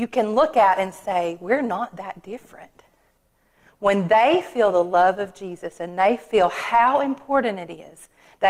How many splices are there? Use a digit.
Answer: 0